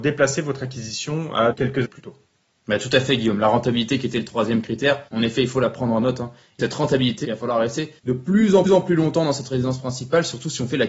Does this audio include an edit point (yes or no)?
yes